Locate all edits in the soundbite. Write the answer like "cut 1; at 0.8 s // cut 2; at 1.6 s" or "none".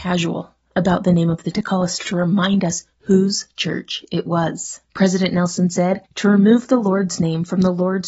cut 1; at 1.5 s // cut 2; at 2.0 s // cut 3; at 4.8 s // cut 4; at 6.1 s